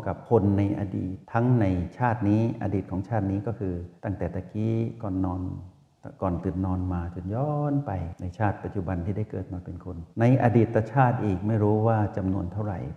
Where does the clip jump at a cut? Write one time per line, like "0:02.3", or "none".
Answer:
0:01.2
0:04.0
0:10.1